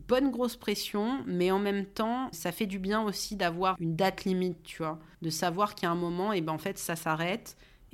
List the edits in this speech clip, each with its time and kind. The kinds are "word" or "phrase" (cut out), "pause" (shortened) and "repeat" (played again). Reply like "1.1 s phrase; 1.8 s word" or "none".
2.3 s word; 3.8 s word; 5.1 s pause